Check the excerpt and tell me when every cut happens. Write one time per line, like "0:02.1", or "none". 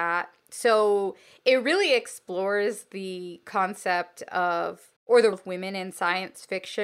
0:05.0
0:05.3